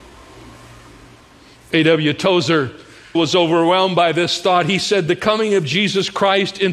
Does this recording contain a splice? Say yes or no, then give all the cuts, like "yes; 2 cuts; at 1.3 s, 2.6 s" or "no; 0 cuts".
yes; 1 cut; at 3.1 s